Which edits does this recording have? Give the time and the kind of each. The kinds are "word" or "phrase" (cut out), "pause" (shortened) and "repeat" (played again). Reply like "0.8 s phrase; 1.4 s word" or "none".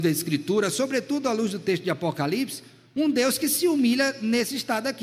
none